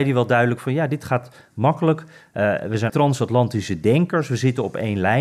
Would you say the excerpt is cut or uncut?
cut